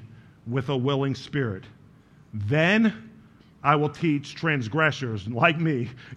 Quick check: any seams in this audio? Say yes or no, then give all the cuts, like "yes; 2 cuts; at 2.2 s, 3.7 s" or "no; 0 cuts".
no; 0 cuts